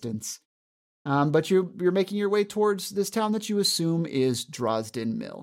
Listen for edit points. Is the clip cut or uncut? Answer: uncut